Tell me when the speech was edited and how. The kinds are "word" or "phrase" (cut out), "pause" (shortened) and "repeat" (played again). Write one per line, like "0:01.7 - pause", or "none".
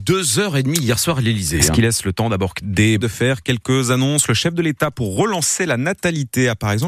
0:03.0 - phrase